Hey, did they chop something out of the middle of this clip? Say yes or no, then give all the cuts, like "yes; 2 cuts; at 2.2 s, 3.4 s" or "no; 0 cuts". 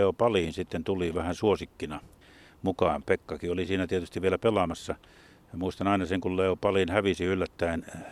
no; 0 cuts